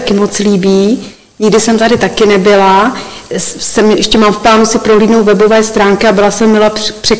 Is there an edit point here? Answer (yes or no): no